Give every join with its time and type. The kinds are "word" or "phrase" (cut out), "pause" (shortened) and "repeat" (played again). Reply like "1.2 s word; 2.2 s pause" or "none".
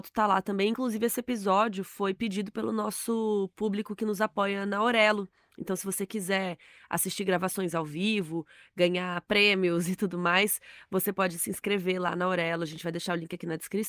none